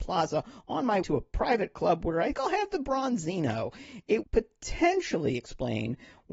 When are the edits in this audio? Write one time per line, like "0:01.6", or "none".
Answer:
0:01.0
0:02.3
0:04.2